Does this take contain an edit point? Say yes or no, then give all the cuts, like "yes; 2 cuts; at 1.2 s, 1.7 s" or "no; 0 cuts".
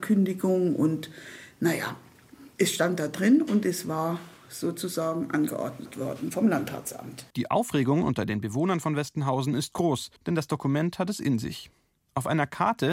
yes; 3 cuts; at 2.5 s, 7.3 s, 10.2 s